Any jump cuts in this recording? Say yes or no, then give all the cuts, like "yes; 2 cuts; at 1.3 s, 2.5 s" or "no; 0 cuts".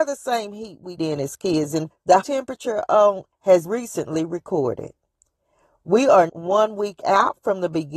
yes; 6 cuts; at 1.0 s, 1.9 s, 2.2 s, 3.3 s, 3.6 s, 6.3 s